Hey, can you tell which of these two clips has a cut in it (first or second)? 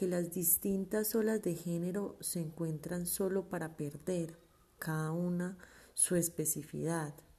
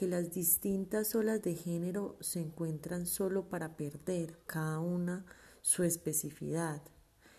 second